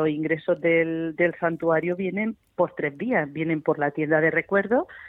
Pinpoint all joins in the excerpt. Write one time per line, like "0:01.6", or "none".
none